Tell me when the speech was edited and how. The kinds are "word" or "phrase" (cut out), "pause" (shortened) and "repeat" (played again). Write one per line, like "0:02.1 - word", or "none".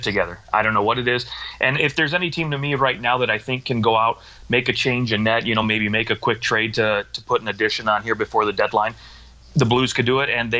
none